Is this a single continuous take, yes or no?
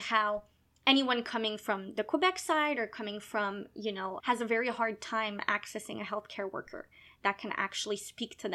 no